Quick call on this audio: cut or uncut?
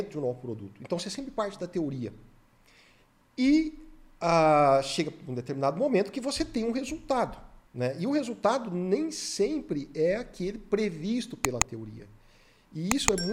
cut